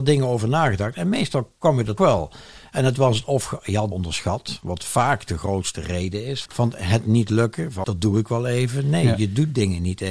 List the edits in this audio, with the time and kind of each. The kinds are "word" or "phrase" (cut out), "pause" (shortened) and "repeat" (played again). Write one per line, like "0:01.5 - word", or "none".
0:02.0 - word
0:03.9 - word
0:06.5 - word
0:07.8 - word